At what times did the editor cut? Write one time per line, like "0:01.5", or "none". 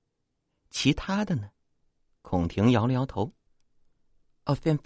0:01.6
0:03.5